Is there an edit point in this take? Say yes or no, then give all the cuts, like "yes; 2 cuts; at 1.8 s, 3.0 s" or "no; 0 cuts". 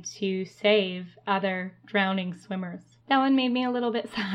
yes; 1 cut; at 3.0 s